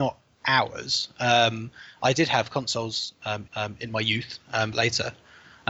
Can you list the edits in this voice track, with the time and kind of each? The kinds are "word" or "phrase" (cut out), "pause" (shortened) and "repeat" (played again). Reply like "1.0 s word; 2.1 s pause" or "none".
3.5 s repeat; 4.7 s phrase